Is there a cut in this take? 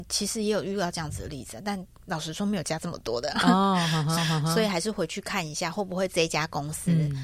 yes; 1 cut; at 4.2 s

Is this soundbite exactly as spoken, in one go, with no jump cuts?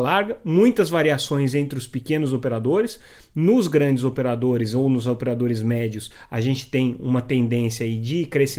yes; 0 cuts

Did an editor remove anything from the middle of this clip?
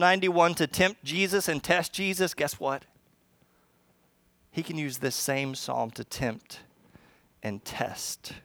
no; 0 cuts

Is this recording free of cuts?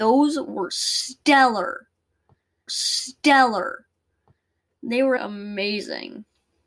no; 2 cuts; at 2.7 s, 5.2 s

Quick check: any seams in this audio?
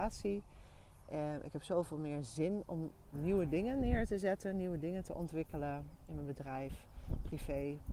yes; 1 cut; at 3.1 s

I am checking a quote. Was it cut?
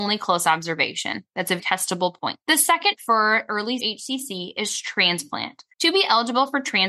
yes; 5 cuts; at 1.6 s, 2.4 s, 3.0 s, 3.8 s, 5.7 s

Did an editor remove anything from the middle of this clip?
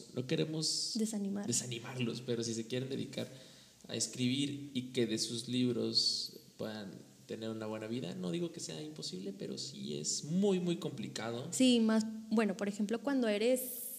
no; 0 cuts

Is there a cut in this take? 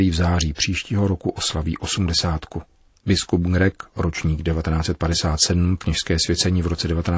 yes; 1 cut; at 5.8 s

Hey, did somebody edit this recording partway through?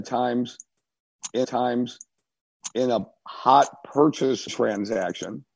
yes; 2 cuts; at 1.4 s, 4.5 s

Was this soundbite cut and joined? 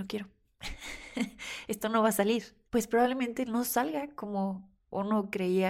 no; 0 cuts

